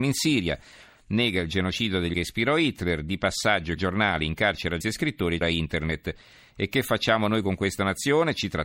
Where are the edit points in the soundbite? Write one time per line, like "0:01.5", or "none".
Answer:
0:02.1
0:03.8
0:04.8
0:05.4